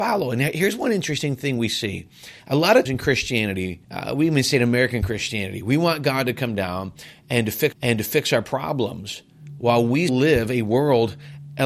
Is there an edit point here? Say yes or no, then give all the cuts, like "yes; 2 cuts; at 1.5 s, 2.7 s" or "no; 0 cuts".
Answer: yes; 5 cuts; at 2.4 s, 2.9 s, 3.8 s, 7.7 s, 10.1 s